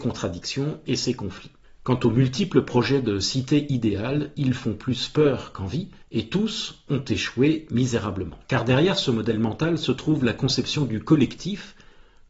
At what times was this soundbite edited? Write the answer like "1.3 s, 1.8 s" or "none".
1.6 s, 6.0 s, 8.4 s